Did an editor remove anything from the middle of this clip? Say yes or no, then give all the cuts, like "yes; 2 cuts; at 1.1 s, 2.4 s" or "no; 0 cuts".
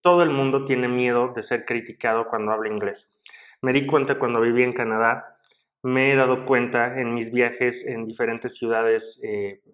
no; 0 cuts